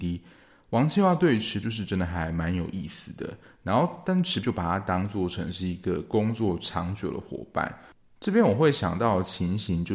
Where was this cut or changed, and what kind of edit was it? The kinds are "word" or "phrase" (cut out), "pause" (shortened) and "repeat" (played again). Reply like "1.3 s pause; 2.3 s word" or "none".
1.6 s word; 4.4 s word